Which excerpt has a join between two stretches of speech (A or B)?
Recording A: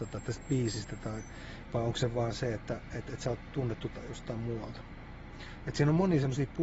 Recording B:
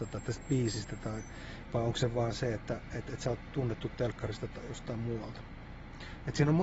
A